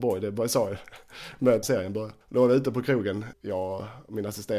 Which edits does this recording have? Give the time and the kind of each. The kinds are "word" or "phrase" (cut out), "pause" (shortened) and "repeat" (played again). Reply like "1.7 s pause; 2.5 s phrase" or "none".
1.6 s phrase; 2.2 s pause; 3.3 s word